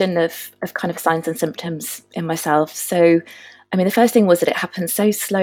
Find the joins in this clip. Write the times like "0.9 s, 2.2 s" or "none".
none